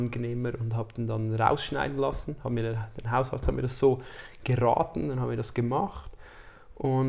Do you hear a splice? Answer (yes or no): no